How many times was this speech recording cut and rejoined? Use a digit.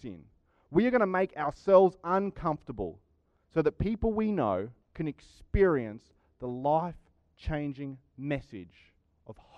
1